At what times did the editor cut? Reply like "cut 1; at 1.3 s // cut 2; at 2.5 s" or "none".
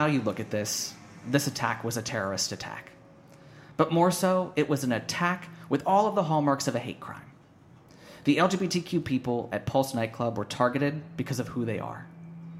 none